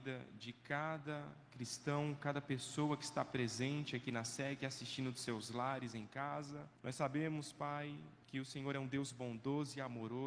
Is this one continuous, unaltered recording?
no; 2 cuts; at 6.8 s, 8.2 s

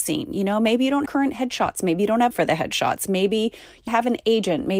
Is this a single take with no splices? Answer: no; 3 cuts; at 1.1 s, 2.3 s, 3.9 s

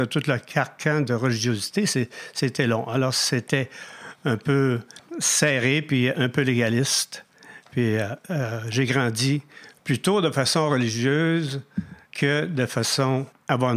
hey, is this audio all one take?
no; 2 cuts; at 5.1 s, 12.0 s

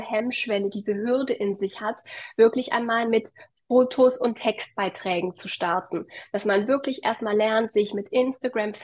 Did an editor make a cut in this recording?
no; 0 cuts

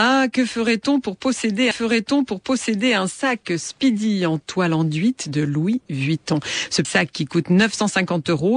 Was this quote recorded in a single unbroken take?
no; 2 cuts; at 1.7 s, 6.8 s

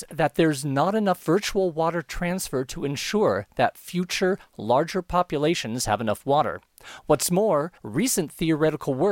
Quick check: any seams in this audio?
yes; 1 cut; at 7.8 s

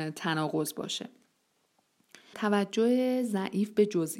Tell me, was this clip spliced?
yes; 1 cut; at 2.3 s

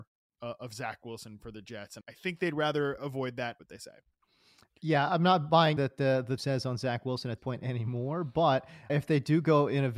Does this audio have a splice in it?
yes; 7 cuts; at 2.0 s, 3.0 s, 3.6 s, 5.8 s, 6.4 s, 7.4 s, 8.9 s

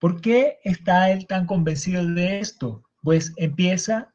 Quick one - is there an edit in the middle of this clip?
no; 0 cuts

